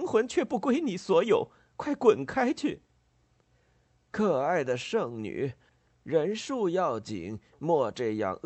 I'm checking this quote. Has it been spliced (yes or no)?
no